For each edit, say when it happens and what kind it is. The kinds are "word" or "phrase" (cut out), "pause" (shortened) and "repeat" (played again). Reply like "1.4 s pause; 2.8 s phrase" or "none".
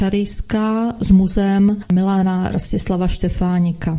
none